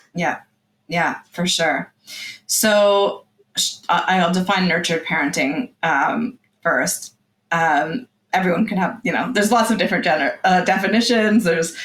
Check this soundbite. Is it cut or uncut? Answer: uncut